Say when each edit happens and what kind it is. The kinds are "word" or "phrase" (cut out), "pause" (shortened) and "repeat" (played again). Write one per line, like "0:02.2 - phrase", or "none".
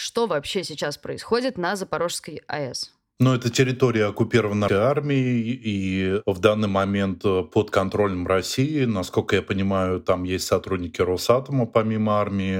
0:04.7 - word